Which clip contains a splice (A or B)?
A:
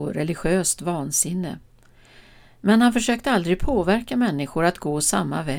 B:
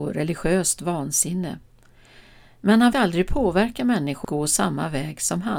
B